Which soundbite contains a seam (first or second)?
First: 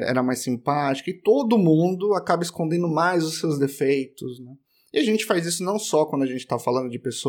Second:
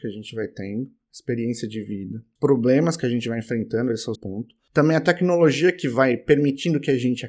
second